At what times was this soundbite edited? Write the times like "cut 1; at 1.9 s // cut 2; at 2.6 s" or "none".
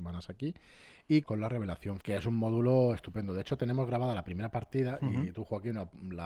cut 1; at 1.2 s // cut 2; at 2.0 s